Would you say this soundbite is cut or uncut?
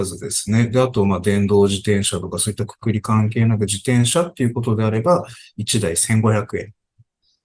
uncut